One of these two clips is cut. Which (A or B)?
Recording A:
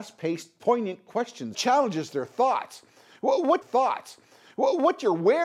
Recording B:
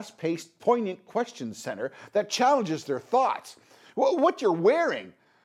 A